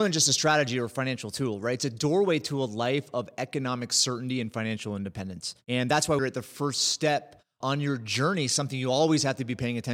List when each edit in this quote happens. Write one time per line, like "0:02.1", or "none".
0:05.6
0:06.2
0:07.6